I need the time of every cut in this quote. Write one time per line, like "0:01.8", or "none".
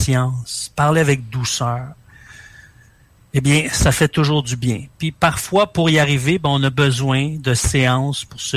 none